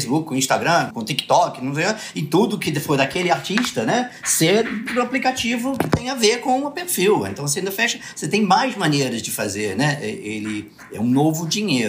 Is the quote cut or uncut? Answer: cut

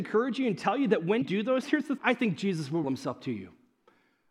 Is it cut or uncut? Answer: cut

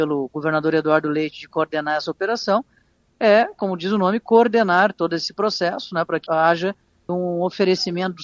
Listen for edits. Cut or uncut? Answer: cut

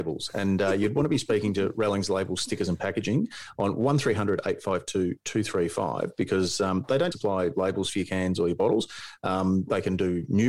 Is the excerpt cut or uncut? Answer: cut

